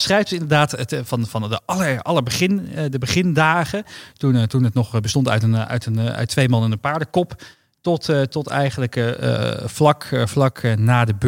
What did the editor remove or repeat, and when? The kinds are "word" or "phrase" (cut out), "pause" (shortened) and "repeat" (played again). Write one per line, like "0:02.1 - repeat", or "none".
0:01.1 - word